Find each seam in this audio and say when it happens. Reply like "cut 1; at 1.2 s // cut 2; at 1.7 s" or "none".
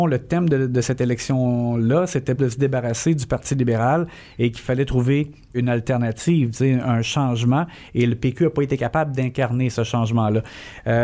cut 1; at 2.4 s // cut 2; at 5.5 s